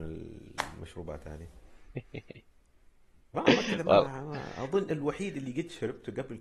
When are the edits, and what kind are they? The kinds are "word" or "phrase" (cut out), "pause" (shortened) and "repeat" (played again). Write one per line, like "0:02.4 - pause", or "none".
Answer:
none